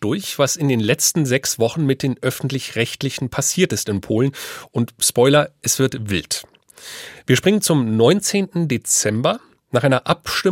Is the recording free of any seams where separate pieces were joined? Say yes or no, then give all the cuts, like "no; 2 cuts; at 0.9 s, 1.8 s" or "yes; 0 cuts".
yes; 0 cuts